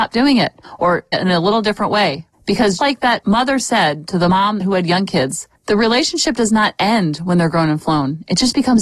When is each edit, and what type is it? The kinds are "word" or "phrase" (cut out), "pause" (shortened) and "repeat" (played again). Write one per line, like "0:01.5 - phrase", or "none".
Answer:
0:01.1 - word
0:02.8 - word